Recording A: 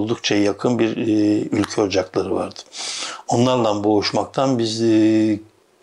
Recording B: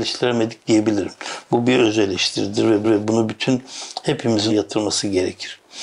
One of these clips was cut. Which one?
B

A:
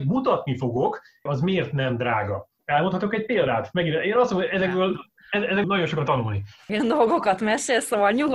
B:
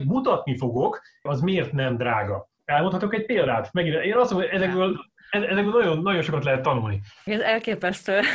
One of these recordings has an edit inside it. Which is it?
A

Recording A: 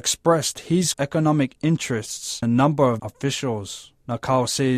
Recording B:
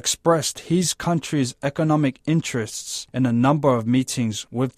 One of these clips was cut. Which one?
A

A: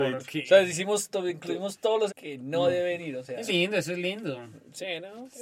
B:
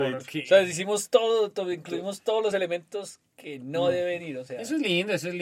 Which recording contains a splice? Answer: A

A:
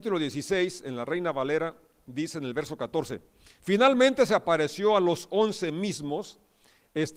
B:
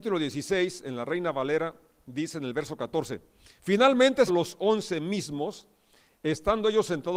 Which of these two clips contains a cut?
B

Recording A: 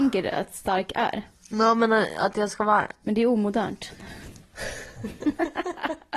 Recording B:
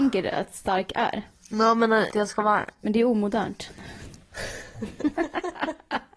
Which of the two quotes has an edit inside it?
B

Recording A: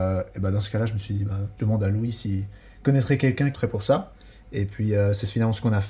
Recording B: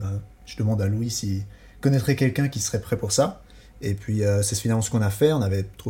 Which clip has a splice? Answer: A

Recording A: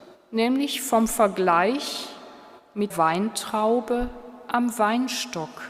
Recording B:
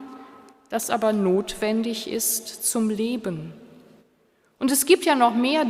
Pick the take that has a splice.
A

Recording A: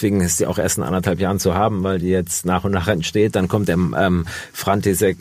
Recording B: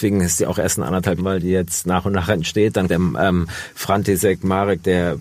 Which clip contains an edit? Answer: B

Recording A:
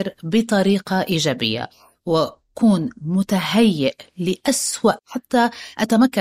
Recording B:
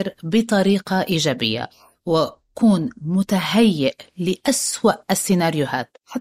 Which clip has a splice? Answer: A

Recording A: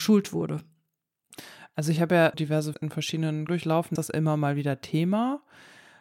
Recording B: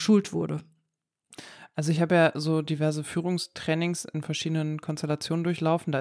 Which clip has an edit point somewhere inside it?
A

